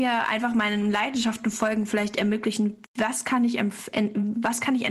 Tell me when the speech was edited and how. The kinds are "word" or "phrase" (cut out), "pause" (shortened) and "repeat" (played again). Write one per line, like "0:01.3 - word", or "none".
0:02.9 - pause